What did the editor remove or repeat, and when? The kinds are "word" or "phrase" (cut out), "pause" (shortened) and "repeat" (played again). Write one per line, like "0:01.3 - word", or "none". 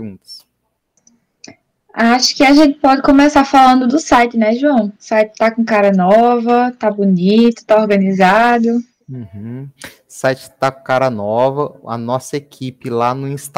0:05.0 - pause